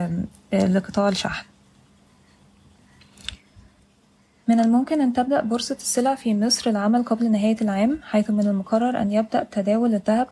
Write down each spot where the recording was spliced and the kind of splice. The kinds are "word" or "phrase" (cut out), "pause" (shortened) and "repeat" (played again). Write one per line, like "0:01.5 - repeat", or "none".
none